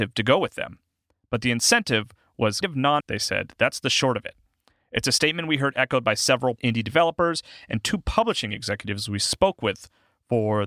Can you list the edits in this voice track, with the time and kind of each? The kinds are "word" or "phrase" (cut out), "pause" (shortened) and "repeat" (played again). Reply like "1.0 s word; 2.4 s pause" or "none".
2.6 s word; 3.0 s word; 6.6 s word